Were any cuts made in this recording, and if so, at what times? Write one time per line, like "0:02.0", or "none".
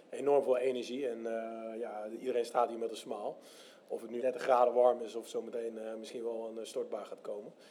0:04.2